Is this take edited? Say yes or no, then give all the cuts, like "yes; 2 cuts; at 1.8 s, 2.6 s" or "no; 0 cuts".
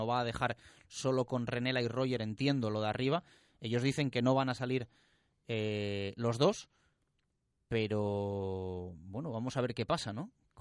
no; 0 cuts